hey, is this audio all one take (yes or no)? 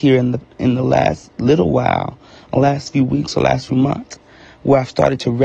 yes